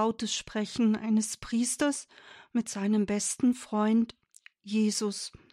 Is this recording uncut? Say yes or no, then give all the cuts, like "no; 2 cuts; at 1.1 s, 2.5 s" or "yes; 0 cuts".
yes; 0 cuts